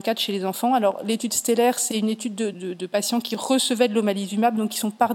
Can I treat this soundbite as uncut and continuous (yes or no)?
no